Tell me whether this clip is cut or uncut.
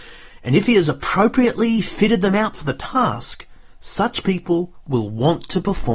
uncut